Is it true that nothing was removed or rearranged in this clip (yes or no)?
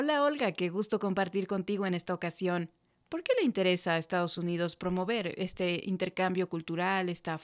yes